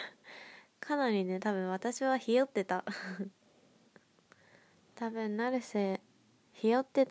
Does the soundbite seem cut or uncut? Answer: uncut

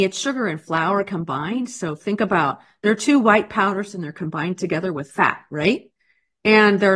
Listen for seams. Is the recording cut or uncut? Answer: uncut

